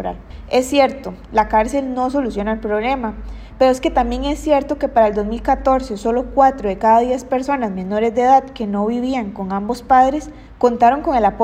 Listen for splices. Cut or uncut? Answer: uncut